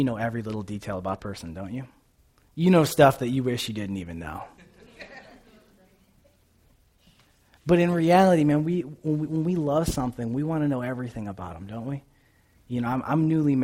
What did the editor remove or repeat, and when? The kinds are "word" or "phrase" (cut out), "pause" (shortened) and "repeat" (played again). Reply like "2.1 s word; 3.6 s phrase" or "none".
1.2 s word